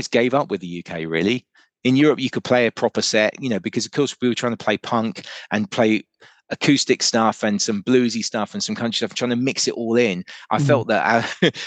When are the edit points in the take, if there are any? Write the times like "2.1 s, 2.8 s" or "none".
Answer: none